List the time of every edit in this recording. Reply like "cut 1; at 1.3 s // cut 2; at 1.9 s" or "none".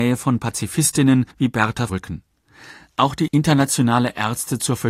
cut 1; at 1.3 s // cut 2; at 1.9 s // cut 3; at 3.3 s